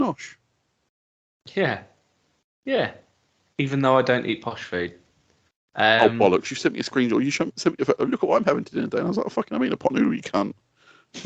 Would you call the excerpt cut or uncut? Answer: uncut